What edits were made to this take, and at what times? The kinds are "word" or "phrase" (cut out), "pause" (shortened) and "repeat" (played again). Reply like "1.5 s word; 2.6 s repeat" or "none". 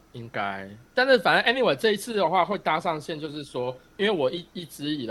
none

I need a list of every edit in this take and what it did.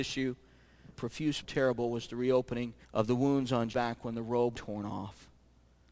1.0 s word; 1.4 s phrase; 2.8 s pause; 3.7 s word; 4.5 s phrase

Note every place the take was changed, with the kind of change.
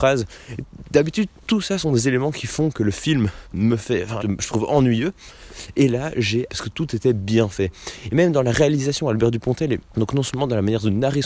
3.4 s pause; 4.2 s word; 6.5 s word; 9.9 s pause

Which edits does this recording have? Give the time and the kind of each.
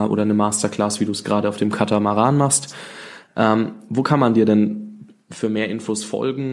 none

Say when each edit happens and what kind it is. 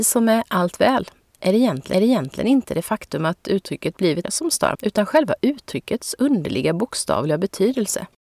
1.9 s repeat; 4.2 s phrase; 4.7 s phrase

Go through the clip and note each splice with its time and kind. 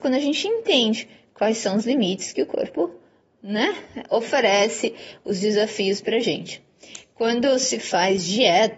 none

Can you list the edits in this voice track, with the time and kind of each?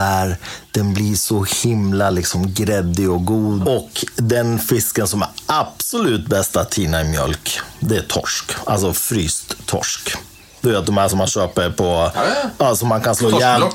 none

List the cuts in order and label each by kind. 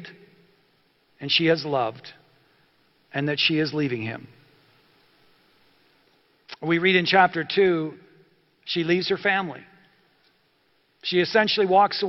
none

